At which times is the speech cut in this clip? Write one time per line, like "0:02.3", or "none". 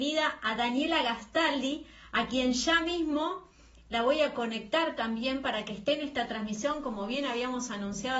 none